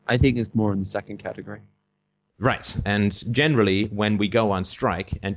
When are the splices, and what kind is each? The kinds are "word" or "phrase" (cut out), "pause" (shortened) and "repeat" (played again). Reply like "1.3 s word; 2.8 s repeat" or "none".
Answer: none